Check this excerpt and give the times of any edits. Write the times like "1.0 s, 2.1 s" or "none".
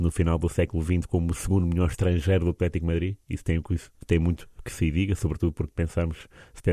3.9 s